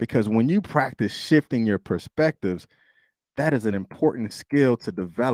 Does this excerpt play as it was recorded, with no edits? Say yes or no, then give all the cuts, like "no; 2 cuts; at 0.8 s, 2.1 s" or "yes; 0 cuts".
yes; 0 cuts